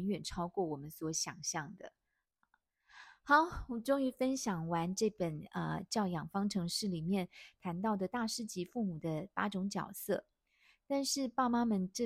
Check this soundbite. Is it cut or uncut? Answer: uncut